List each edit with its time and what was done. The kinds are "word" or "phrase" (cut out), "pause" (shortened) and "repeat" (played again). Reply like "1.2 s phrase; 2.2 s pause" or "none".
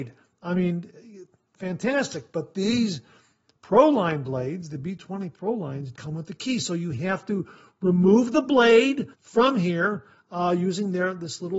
6.0 s word; 9.1 s pause